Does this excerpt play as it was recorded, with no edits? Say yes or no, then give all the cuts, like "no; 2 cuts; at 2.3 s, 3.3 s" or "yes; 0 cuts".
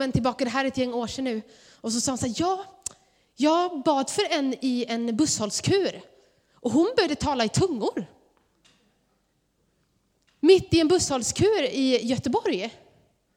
yes; 0 cuts